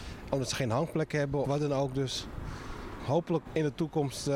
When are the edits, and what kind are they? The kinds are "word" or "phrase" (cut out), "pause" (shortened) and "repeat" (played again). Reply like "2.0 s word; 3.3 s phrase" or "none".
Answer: 1.4 s word; 3.0 s word; 3.5 s word